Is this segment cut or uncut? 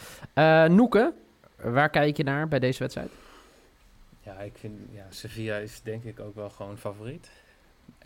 uncut